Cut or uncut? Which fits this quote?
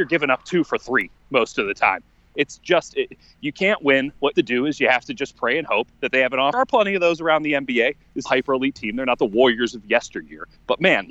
cut